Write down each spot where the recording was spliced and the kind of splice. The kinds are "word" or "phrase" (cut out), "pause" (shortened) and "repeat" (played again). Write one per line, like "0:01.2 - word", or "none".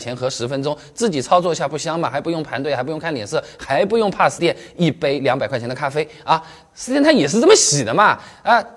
0:04.4 - word
0:06.9 - word